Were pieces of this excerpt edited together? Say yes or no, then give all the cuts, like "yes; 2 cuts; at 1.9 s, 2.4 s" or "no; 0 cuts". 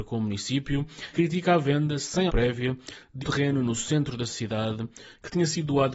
yes; 3 cuts; at 1.1 s, 2.3 s, 3.2 s